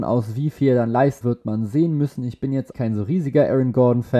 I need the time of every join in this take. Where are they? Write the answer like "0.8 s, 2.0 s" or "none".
1.2 s, 2.7 s

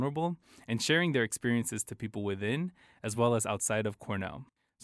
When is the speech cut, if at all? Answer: none

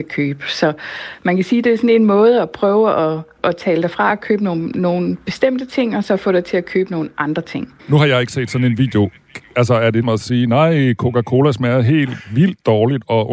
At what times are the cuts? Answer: 3.4 s, 7.8 s, 10.0 s

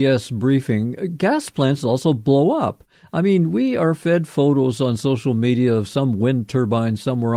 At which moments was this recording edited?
none

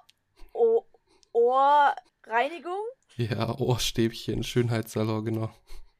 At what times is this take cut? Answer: 2.1 s

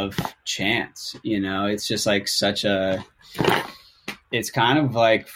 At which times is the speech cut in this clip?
4.2 s

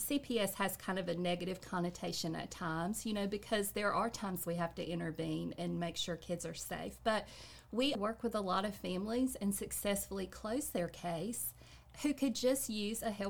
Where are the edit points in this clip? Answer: 7.9 s

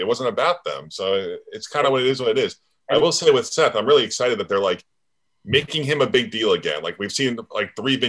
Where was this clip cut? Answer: none

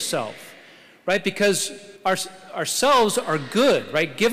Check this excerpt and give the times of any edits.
2.0 s

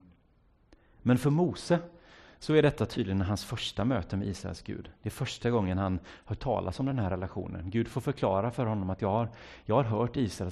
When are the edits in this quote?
none

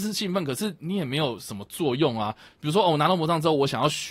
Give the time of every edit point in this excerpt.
none

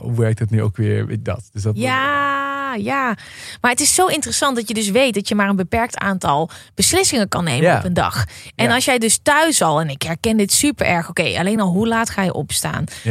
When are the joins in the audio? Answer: none

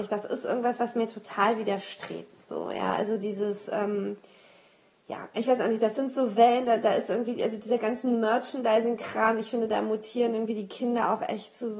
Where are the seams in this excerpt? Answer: none

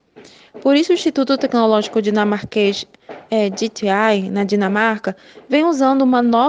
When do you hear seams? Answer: none

